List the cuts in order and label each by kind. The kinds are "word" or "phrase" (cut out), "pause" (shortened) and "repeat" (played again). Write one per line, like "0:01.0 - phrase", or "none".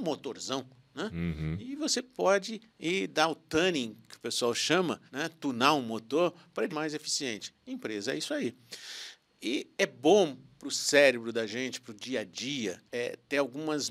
0:02.7 - pause
0:05.1 - pause
0:06.7 - phrase
0:09.7 - pause
0:12.9 - pause